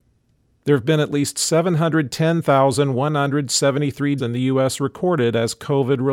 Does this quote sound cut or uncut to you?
cut